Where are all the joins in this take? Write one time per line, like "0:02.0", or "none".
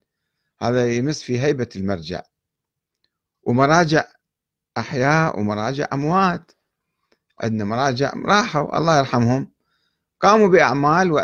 none